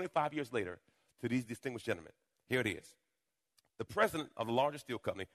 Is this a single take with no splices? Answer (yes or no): yes